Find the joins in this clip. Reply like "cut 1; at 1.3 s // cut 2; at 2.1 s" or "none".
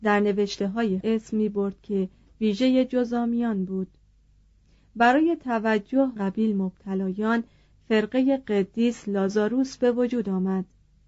cut 1; at 1.0 s // cut 2; at 6.2 s